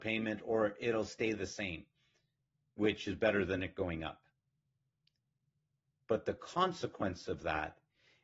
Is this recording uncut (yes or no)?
yes